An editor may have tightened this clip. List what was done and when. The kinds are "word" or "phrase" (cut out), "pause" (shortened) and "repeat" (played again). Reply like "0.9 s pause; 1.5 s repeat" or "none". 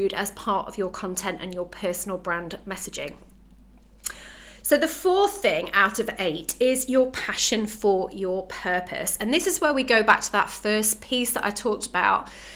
none